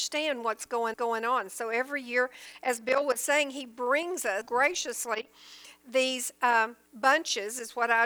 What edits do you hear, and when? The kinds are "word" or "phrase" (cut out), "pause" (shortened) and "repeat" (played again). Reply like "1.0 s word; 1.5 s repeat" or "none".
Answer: 0.9 s repeat; 4.4 s word; 6.8 s pause